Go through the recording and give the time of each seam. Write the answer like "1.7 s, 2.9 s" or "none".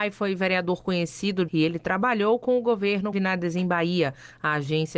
1.5 s, 3.1 s